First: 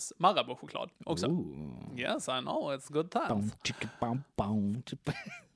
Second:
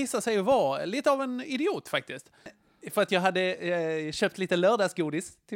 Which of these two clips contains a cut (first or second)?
first